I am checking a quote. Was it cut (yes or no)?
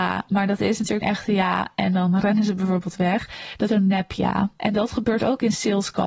yes